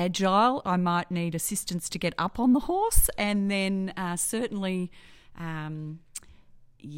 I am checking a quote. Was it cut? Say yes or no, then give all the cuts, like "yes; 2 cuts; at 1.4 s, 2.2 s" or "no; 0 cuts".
no; 0 cuts